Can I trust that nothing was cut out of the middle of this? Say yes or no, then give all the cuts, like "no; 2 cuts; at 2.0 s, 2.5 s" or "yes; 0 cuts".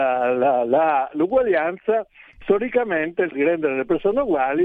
no; 2 cuts; at 2.4 s, 3.3 s